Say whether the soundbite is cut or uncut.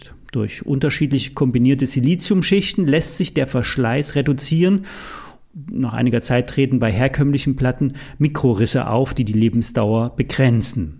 uncut